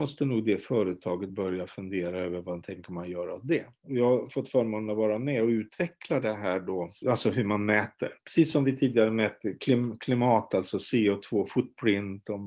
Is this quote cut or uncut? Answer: uncut